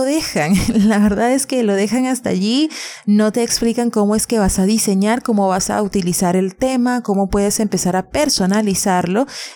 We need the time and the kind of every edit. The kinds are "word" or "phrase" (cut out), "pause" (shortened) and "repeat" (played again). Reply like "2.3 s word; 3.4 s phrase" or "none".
none